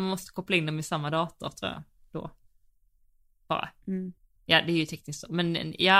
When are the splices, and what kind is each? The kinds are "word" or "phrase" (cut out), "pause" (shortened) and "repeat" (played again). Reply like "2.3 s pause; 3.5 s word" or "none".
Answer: 4.2 s pause